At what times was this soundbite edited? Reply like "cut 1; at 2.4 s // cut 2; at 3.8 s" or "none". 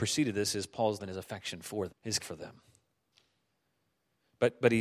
cut 1; at 1.0 s // cut 2; at 1.9 s // cut 3; at 2.2 s

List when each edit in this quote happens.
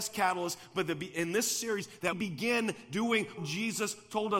cut 1; at 2.1 s // cut 2; at 3.4 s

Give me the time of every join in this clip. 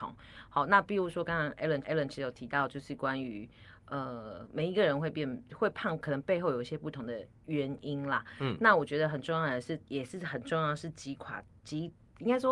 cut 1; at 1.8 s

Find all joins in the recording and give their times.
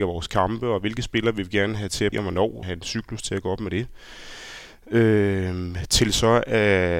cut 1; at 2.1 s // cut 2; at 2.6 s

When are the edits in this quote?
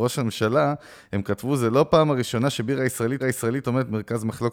cut 1; at 3.2 s

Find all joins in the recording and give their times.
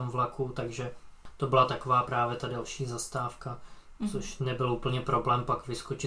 none

